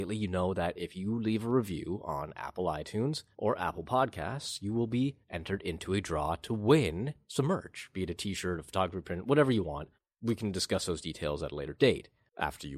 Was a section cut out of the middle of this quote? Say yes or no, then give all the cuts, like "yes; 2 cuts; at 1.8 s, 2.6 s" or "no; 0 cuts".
yes; 4 cuts; at 3.3 s, 5.2 s, 7.2 s, 9.9 s